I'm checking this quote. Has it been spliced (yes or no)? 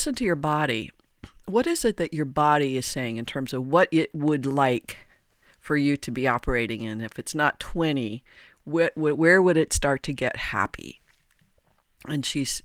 no